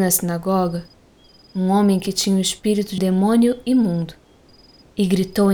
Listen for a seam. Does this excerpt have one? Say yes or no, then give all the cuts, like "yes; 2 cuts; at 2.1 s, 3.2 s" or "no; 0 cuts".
yes; 1 cut; at 3.0 s